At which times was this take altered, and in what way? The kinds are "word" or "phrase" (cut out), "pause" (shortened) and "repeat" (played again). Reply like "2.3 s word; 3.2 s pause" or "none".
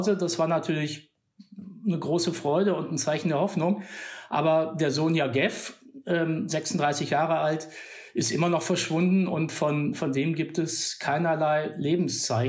none